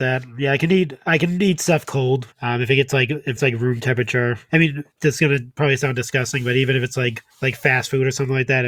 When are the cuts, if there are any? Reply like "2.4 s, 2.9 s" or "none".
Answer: 2.3 s, 3.4 s, 4.5 s, 4.9 s, 7.3 s